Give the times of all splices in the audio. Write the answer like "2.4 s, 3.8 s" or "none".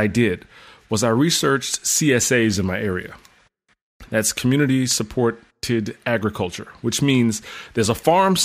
none